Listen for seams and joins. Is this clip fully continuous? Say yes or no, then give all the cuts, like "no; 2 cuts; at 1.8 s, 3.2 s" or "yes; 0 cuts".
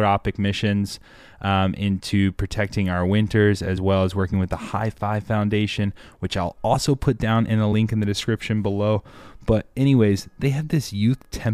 yes; 0 cuts